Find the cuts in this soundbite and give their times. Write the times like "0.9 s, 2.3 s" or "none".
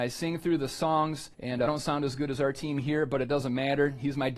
1.3 s, 1.7 s

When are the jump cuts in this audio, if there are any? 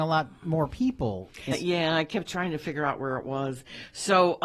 1.5 s

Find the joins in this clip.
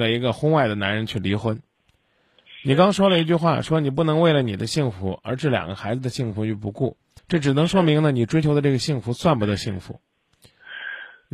7.2 s

